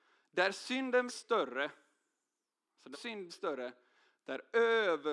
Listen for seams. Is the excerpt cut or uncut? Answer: cut